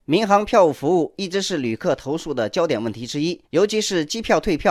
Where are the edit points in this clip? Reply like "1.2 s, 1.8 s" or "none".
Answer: 3.5 s